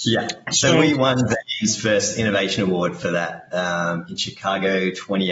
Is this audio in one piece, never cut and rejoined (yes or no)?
yes